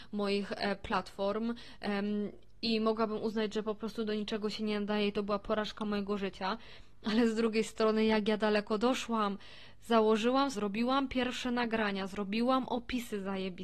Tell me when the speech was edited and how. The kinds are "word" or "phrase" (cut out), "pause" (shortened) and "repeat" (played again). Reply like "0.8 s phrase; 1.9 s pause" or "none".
10.5 s phrase